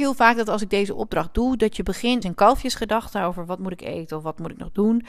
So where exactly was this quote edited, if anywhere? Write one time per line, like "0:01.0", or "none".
0:02.2